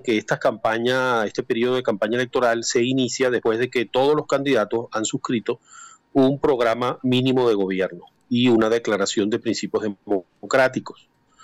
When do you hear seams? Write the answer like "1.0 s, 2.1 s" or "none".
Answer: none